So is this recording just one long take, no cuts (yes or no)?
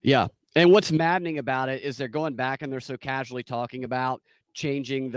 yes